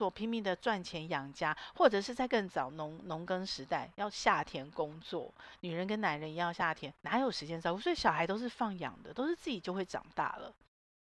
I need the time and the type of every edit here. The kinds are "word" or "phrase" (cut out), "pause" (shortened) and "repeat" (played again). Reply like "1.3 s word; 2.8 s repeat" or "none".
7.0 s pause